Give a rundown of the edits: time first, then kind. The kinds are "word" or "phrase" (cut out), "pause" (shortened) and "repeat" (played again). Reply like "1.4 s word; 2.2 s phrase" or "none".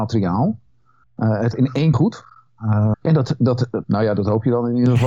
1.5 s word; 1.9 s word; 2.9 s word; 3.8 s word